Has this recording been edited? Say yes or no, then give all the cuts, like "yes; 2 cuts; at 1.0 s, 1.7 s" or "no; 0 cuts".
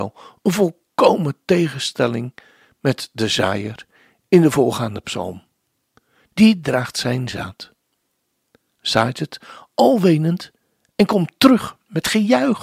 no; 0 cuts